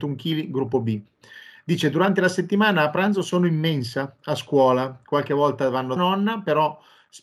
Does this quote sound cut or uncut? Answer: cut